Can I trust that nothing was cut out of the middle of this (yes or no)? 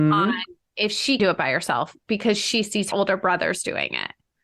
no